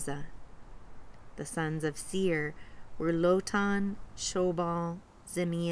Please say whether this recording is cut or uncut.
uncut